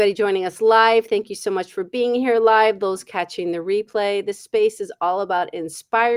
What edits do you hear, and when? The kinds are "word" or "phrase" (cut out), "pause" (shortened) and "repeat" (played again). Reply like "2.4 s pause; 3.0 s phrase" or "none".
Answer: none